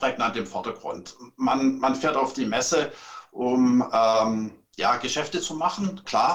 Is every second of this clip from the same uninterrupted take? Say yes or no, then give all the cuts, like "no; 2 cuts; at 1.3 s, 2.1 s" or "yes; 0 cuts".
yes; 0 cuts